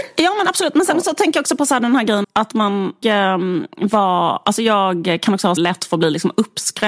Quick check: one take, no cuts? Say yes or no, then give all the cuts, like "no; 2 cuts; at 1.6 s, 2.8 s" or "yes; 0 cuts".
no; 3 cuts; at 2.2 s, 3.0 s, 5.6 s